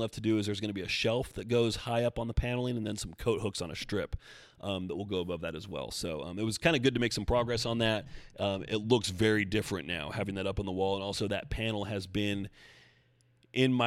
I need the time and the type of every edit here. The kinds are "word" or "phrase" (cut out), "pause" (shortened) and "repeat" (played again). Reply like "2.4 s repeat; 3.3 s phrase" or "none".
none